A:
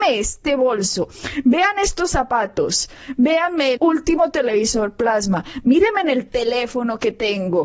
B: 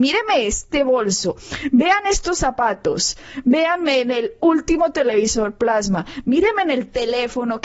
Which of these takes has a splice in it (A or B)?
A